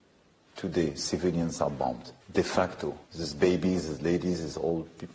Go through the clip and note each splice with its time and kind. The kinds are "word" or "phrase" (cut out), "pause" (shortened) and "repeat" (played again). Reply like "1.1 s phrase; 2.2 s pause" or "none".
2.2 s pause; 3.0 s pause